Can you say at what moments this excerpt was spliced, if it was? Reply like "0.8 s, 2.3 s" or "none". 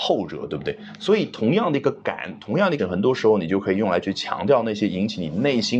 2.8 s